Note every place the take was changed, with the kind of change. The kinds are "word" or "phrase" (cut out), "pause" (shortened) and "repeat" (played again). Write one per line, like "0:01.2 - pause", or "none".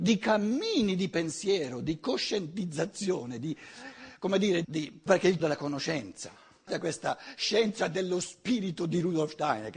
0:04.6 - word
0:05.1 - word
0:05.4 - word
0:06.7 - word